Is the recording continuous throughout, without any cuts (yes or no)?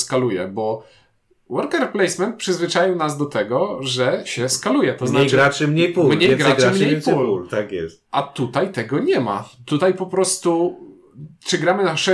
yes